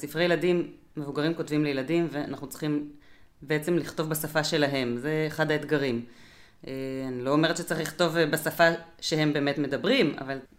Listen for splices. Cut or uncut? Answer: uncut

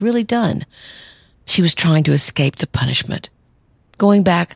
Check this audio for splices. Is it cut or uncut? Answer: uncut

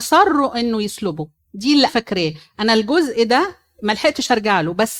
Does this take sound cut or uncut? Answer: cut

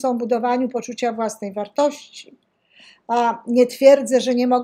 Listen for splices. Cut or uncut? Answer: uncut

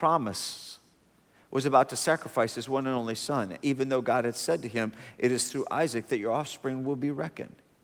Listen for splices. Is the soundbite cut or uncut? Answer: uncut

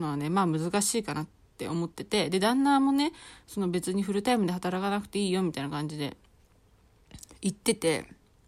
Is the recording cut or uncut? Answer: uncut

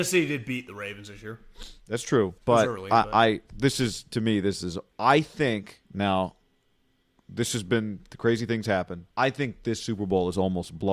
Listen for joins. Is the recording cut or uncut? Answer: cut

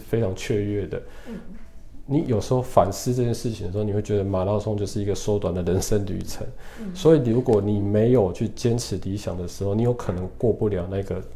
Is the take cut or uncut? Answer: uncut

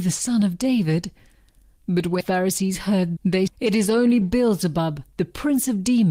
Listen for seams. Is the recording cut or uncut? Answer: cut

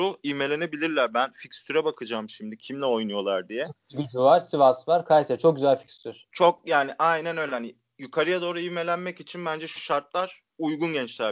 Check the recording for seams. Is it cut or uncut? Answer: cut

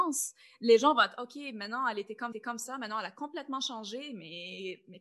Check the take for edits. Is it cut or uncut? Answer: cut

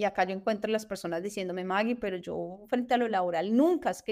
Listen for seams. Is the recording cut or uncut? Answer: uncut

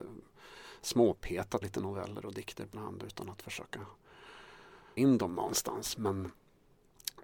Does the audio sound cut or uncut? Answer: cut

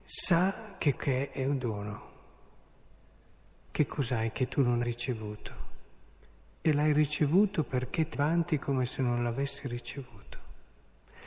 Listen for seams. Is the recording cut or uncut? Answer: cut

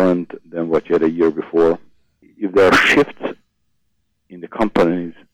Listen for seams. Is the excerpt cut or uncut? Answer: uncut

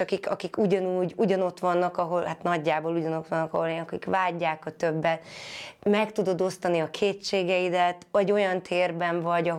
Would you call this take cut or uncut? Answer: uncut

